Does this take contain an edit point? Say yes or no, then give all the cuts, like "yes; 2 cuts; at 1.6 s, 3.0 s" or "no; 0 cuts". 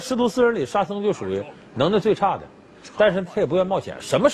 no; 0 cuts